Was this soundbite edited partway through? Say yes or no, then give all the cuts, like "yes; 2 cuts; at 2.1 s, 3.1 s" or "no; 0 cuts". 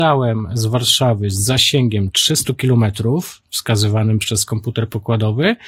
no; 0 cuts